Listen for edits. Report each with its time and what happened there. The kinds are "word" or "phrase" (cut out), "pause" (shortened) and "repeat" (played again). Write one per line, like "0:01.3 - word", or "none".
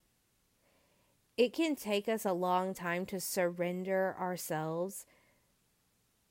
none